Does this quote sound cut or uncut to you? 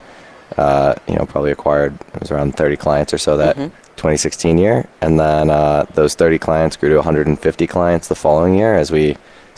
cut